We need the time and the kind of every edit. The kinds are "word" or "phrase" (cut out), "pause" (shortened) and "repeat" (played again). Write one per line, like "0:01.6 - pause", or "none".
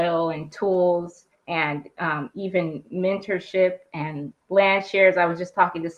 0:01.3 - pause
0:04.4 - pause